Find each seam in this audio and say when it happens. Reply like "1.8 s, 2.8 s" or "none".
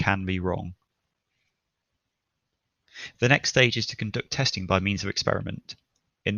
none